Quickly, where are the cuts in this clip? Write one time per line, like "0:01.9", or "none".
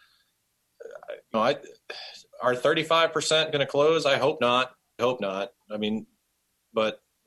0:01.3
0:05.0